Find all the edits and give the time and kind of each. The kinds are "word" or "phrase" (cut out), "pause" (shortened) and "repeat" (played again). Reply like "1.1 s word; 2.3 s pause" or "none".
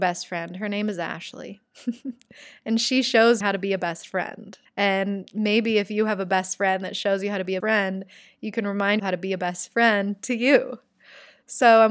3.4 s word; 4.7 s pause; 7.6 s word; 9.0 s word